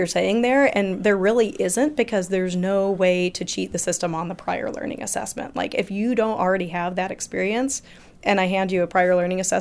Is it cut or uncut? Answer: uncut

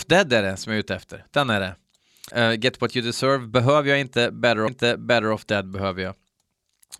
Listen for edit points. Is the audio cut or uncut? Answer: cut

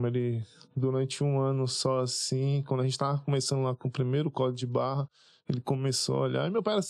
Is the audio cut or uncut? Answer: uncut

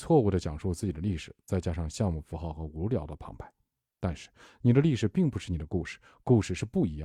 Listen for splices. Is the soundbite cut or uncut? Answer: uncut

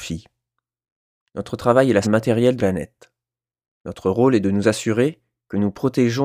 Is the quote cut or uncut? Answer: cut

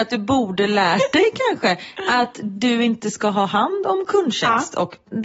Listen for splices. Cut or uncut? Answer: uncut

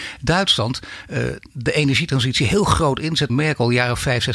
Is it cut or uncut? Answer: cut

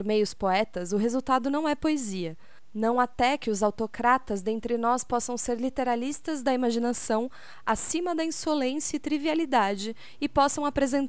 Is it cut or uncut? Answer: uncut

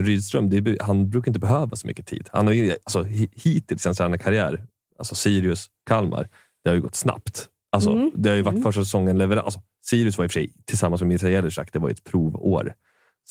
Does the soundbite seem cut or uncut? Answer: uncut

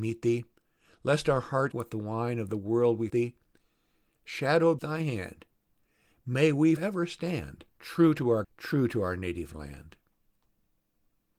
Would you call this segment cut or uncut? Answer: cut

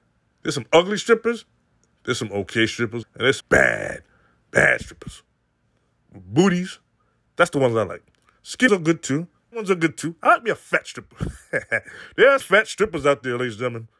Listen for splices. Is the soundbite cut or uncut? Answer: cut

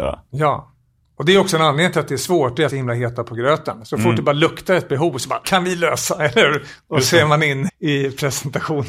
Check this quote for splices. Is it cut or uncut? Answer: cut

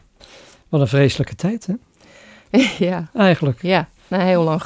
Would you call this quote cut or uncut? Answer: uncut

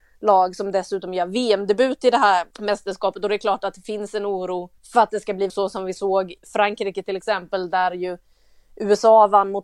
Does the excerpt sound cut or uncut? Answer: cut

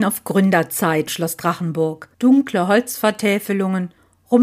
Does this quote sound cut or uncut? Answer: cut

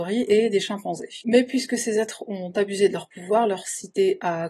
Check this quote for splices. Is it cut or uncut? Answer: uncut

